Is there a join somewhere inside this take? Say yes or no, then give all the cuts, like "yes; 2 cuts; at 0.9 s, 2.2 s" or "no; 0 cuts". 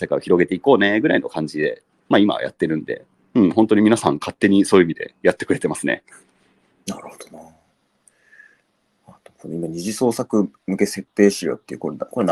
no; 0 cuts